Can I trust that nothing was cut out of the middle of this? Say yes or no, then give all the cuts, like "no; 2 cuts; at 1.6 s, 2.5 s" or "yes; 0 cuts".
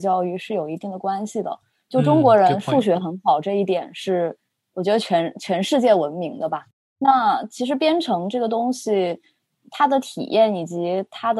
yes; 0 cuts